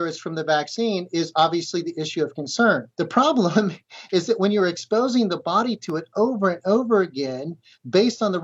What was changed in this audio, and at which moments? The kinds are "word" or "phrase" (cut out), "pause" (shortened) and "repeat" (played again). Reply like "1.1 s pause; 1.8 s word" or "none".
2.9 s pause